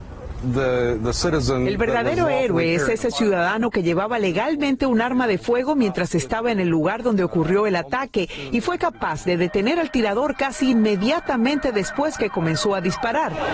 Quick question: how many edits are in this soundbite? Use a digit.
0